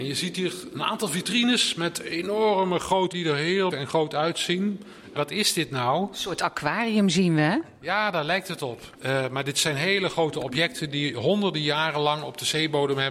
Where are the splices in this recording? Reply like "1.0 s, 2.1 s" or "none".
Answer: 3.1 s, 3.7 s, 5.2 s, 9.0 s